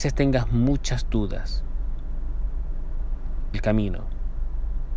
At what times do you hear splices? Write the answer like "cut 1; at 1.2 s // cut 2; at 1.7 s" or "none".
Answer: cut 1; at 3.5 s